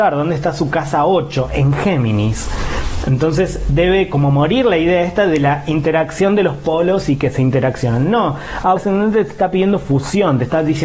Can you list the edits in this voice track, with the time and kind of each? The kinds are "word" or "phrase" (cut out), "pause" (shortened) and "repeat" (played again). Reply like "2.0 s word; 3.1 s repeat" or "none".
8.8 s phrase